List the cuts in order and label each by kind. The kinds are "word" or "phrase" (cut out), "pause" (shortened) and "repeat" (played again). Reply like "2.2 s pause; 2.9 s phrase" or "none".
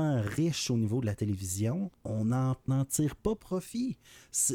1.9 s pause; 2.7 s word